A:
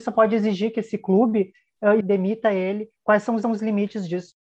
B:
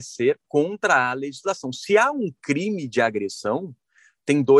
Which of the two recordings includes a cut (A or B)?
A